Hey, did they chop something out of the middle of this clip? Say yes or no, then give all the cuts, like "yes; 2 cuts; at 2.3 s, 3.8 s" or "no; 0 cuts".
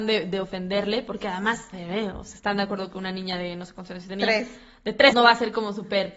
yes; 2 cuts; at 1.7 s, 5.1 s